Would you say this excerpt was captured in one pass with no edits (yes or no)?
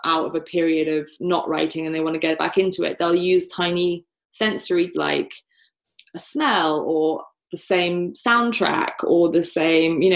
no